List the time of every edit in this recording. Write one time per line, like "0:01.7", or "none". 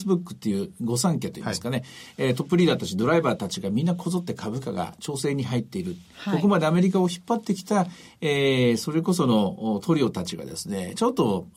none